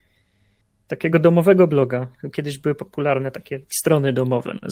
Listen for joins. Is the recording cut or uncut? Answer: uncut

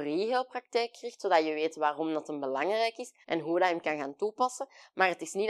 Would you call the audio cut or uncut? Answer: cut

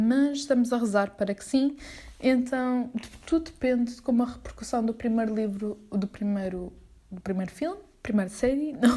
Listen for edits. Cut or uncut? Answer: uncut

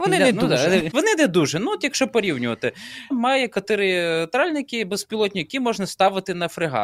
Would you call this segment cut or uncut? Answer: cut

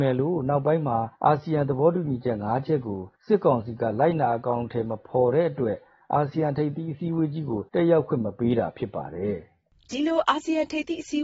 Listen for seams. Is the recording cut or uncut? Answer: cut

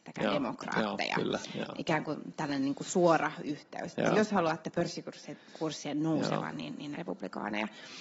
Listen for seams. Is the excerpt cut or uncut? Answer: cut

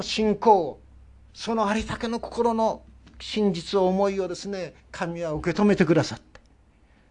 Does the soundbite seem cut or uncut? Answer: cut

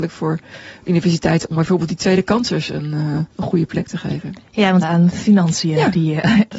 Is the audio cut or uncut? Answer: cut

